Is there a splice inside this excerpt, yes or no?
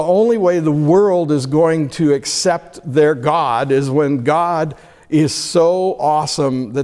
no